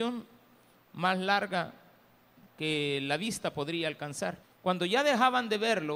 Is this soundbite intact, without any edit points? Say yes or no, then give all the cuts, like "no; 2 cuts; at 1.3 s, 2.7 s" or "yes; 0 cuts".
no; 1 cut; at 4.4 s